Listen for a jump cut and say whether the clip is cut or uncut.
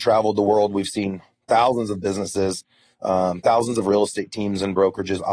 uncut